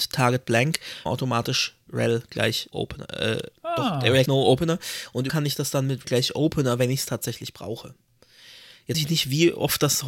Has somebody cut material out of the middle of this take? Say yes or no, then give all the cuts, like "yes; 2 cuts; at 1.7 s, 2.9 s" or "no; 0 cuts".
yes; 6 cuts; at 1.1 s, 2.7 s, 4.3 s, 5.3 s, 6.0 s, 8.9 s